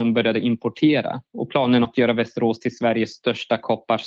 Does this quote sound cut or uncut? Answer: cut